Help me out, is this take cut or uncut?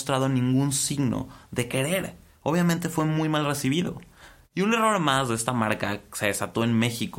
uncut